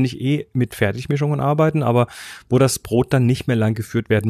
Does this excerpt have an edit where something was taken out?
no; 0 cuts

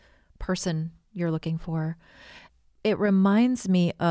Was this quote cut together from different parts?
no; 0 cuts

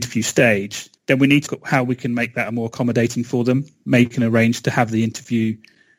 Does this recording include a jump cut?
yes; 3 cuts; at 1.0 s, 1.5 s, 4.1 s

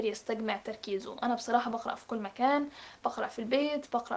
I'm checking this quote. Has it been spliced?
no; 0 cuts

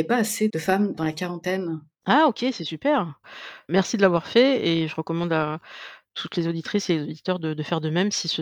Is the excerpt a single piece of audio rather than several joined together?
yes; 0 cuts

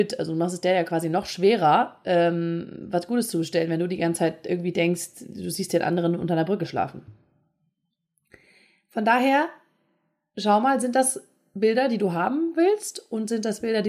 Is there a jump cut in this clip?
no; 0 cuts

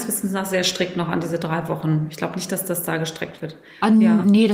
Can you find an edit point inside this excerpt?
no; 0 cuts

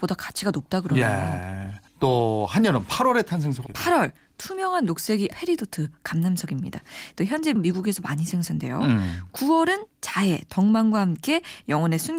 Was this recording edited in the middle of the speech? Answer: yes; 5 cuts; at 1.9 s, 3.7 s, 5.3 s, 7.2 s, 7.6 s

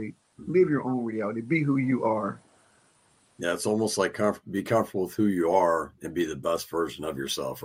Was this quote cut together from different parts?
no; 0 cuts

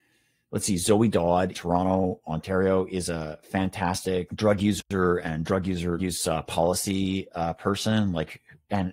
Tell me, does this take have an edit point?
yes; 3 cuts; at 1.5 s, 4.3 s, 6.0 s

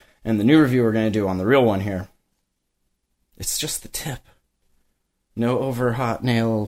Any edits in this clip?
no; 0 cuts

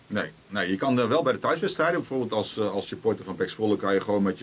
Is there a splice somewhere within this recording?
no; 0 cuts

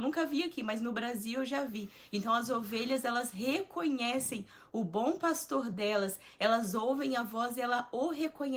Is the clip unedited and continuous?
yes; 0 cuts

